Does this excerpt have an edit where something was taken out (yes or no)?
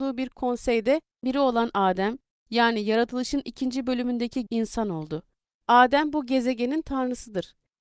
yes